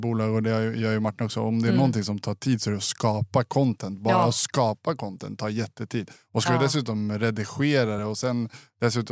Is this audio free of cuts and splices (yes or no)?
yes